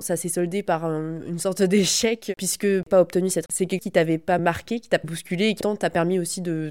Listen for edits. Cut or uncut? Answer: cut